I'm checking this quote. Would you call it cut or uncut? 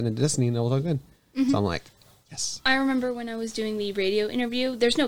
uncut